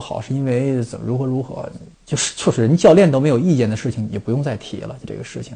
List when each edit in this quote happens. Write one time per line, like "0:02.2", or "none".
0:01.9